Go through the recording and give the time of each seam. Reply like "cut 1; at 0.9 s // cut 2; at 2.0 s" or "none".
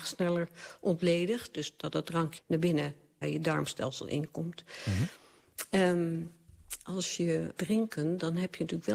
cut 1; at 2.4 s // cut 2; at 3.2 s // cut 3; at 7.5 s